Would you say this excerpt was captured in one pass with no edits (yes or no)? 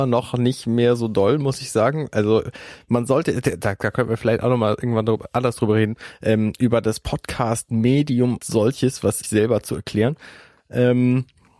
no